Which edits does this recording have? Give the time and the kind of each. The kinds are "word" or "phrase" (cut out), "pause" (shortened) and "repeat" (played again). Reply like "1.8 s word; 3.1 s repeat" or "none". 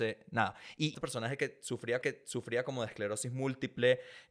0.9 s phrase; 2.0 s repeat